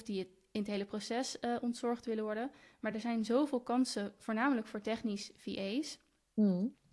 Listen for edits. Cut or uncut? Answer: uncut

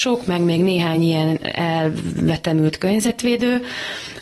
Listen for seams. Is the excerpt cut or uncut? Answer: uncut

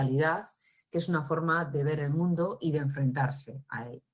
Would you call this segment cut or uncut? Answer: uncut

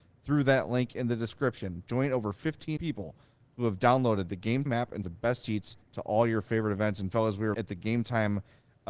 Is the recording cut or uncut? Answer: cut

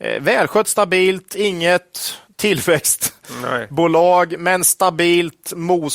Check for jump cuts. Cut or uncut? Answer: cut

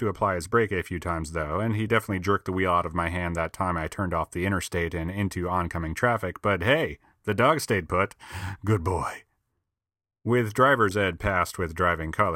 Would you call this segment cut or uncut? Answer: uncut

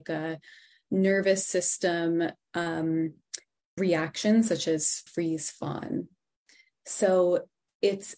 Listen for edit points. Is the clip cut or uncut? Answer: cut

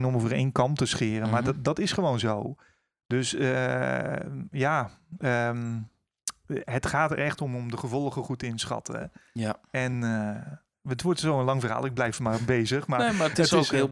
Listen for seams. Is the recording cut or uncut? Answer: uncut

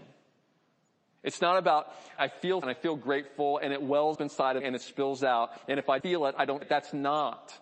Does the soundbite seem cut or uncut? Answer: cut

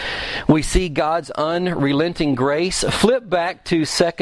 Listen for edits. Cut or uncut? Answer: uncut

